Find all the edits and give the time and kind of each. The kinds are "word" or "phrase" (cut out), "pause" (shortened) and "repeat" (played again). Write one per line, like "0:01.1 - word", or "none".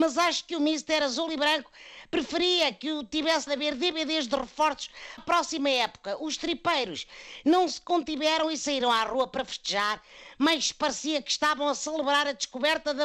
0:03.5 - word
0:05.2 - word

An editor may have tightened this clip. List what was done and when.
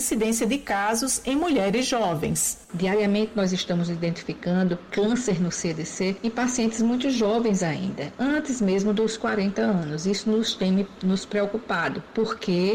0:02.6 - pause

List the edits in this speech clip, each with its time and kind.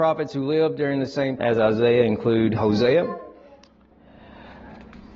0:01.4 - word
0:02.6 - word

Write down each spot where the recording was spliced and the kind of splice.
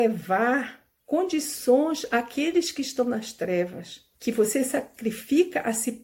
0:00.9 - pause
0:04.1 - pause

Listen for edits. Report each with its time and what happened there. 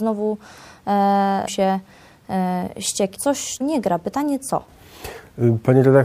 0:01.5 - word
0:03.1 - word
0:03.6 - word

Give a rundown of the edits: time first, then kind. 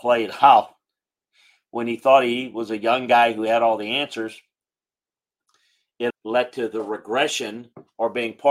0:06.1 - word

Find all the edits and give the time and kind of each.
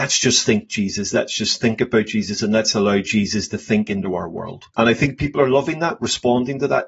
none

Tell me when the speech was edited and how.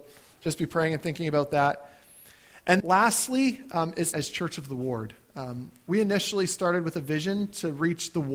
0:02.8 - word
0:04.1 - phrase

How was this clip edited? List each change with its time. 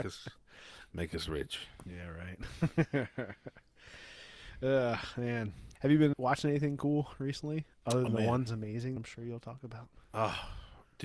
0:05.7 - pause
0:06.1 - word
0:08.1 - word
0:08.5 - phrase
0:09.0 - word

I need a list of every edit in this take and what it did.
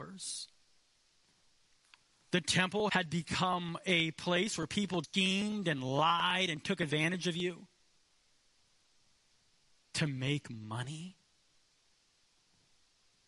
0:02.9 - word
0:05.0 - word

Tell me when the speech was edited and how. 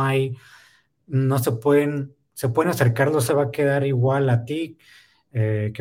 0:03.3 - phrase

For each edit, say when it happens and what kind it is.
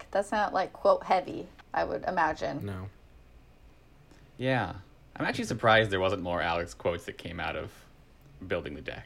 0:01.6 - pause

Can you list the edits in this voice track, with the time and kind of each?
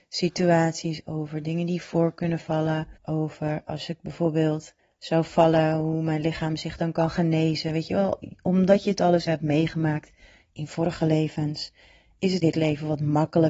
0:03.0 - pause
0:04.8 - pause
0:09.3 - word
0:12.4 - word

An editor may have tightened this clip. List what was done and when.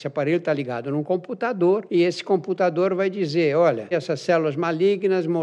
0:03.9 - word

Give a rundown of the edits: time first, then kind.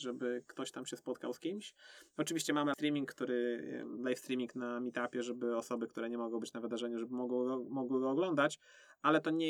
0:02.7 - word

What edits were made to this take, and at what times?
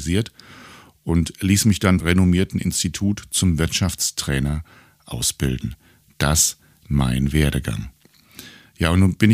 0:02.0 - phrase
0:06.8 - word

